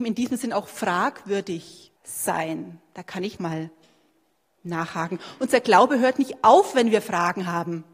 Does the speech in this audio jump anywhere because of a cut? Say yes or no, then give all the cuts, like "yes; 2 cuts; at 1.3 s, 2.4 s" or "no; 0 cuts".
yes; 2 cuts; at 2.0 s, 3.4 s